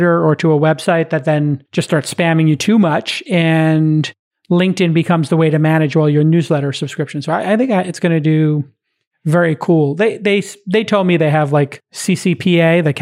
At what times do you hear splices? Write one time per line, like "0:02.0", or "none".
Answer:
0:01.7